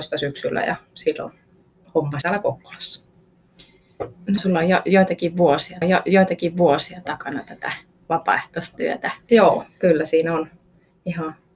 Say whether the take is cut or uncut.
cut